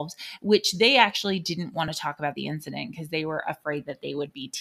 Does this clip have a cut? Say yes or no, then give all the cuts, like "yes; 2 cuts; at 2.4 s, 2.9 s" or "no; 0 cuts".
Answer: no; 0 cuts